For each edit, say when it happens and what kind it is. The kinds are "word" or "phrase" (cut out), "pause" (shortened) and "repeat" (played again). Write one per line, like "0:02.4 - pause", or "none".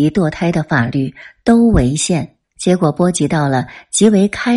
0:02.4 - pause